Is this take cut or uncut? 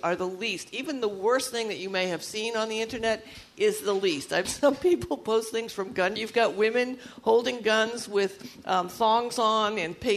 cut